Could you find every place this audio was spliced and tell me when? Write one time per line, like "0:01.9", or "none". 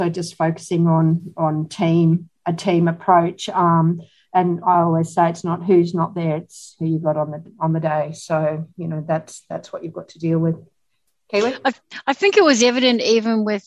none